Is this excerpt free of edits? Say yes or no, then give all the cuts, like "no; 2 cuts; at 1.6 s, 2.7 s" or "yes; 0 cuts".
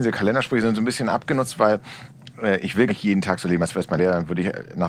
no; 2 cuts; at 2.9 s, 4.0 s